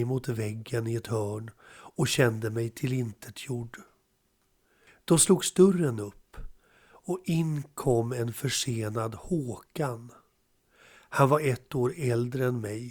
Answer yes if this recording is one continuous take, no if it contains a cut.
yes